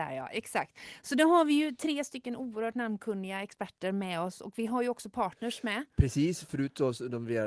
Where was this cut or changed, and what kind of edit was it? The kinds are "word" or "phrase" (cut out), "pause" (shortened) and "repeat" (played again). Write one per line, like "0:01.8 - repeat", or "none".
none